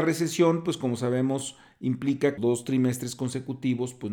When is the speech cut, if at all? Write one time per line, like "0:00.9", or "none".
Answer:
0:02.4